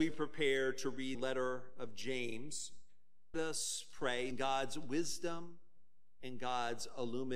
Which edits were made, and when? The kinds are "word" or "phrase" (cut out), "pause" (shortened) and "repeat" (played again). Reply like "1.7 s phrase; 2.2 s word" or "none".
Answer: 1.1 s word; 3.3 s word; 4.3 s word